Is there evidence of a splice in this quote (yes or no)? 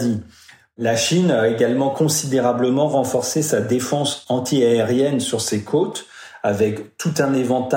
no